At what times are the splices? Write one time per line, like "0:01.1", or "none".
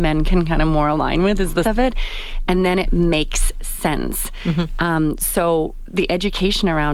0:01.6